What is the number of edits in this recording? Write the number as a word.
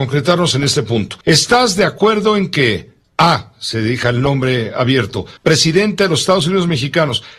three